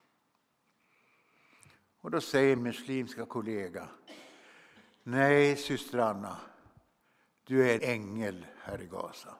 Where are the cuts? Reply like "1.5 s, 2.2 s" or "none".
2.6 s, 7.8 s